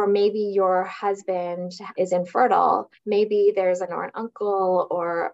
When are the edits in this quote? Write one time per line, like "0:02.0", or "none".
0:02.0
0:02.9
0:03.9